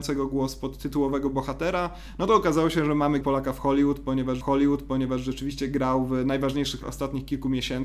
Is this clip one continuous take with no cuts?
no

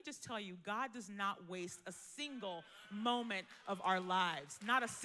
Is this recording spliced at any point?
no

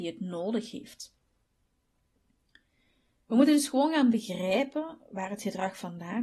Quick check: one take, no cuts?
yes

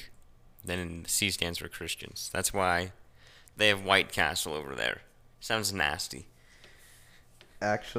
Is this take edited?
no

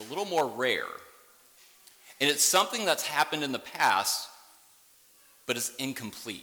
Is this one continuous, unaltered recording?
yes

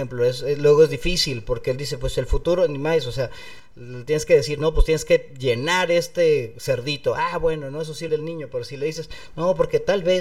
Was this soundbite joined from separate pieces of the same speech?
yes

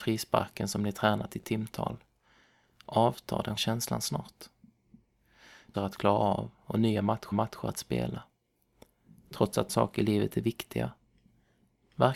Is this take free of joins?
no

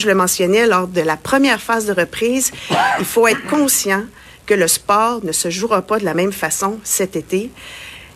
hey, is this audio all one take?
yes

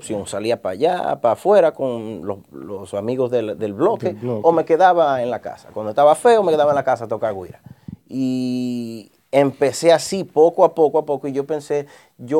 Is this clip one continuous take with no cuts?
yes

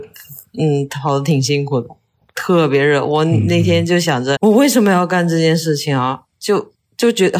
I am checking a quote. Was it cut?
yes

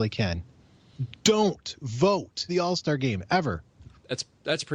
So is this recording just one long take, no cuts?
no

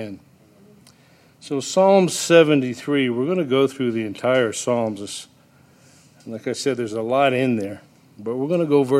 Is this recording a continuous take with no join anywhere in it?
yes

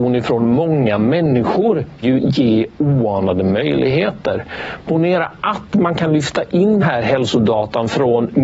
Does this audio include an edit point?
yes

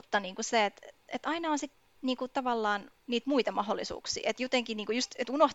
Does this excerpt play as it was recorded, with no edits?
yes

